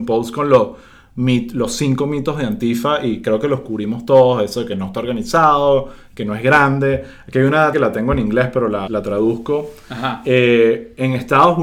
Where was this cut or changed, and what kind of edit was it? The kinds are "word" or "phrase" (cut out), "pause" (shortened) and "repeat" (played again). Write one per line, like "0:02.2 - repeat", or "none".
0:07.7 - word
0:08.9 - word